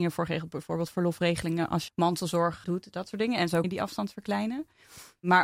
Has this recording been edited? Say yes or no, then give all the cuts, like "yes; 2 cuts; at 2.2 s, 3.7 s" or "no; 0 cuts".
yes; 2 cuts; at 1.9 s, 3.6 s